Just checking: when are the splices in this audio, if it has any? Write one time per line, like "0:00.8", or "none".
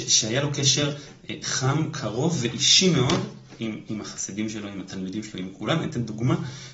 none